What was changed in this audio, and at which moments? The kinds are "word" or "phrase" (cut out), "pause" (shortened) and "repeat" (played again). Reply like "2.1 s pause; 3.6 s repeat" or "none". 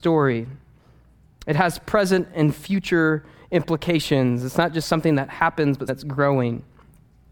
5.9 s word